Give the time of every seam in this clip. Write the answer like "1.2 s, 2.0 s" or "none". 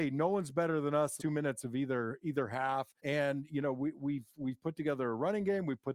1.2 s, 3.0 s